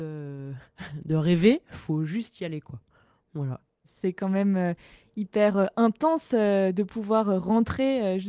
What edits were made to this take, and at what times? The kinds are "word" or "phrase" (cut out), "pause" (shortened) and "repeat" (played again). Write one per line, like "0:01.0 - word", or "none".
none